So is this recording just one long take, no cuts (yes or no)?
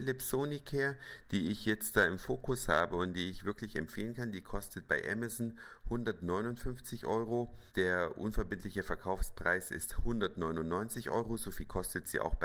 no